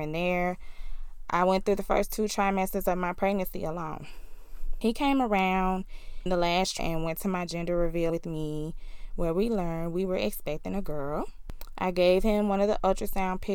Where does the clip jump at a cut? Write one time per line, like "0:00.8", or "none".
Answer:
0:06.3
0:06.8
0:08.1